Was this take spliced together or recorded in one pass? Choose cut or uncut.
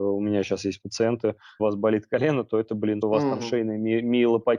cut